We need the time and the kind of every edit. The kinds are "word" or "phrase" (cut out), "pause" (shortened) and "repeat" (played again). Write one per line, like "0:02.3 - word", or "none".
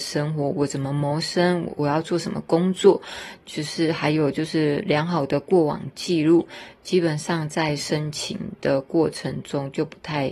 none